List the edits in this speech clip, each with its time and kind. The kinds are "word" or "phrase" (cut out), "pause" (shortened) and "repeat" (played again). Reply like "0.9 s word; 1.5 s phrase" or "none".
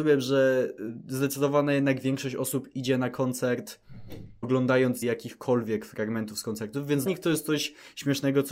4.4 s word; 5.0 s word; 7.1 s word